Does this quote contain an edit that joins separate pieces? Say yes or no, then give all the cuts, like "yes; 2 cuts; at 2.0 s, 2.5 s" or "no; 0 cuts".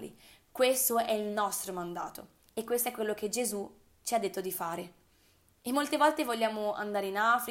no; 0 cuts